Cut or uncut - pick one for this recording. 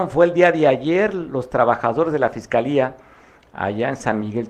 uncut